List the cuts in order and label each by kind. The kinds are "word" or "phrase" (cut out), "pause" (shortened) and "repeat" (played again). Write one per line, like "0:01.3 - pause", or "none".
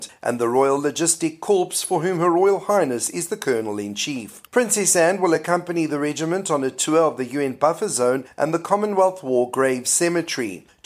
none